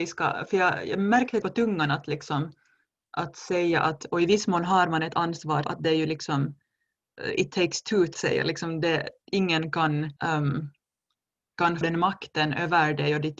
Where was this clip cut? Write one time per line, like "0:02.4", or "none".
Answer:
0:01.4
0:05.6
0:08.1
0:10.2
0:11.8